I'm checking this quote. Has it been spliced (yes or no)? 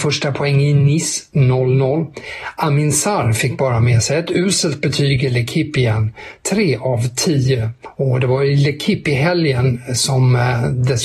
no